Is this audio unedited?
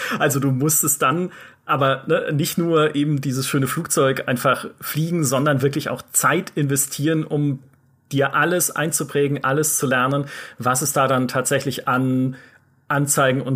yes; 0 cuts

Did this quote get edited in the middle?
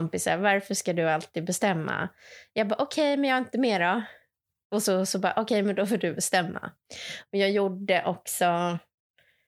no; 0 cuts

